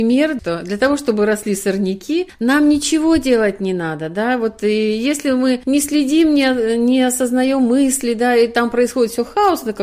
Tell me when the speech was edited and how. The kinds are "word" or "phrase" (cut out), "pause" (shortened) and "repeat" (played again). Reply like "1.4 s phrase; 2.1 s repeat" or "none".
none